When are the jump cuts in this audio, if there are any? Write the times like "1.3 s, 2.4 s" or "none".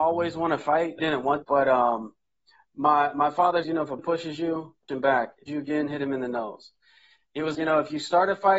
1.0 s, 1.4 s, 3.6 s, 4.0 s, 4.9 s, 5.5 s, 7.5 s